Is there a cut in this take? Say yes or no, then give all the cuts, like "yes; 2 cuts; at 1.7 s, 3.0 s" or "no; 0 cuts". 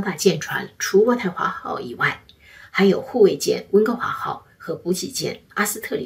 no; 0 cuts